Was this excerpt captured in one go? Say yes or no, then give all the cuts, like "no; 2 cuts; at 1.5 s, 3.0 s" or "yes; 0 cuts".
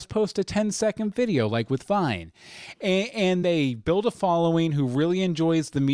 no; 1 cut; at 3.4 s